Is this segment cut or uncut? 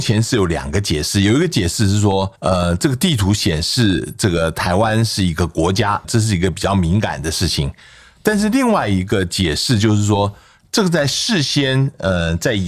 cut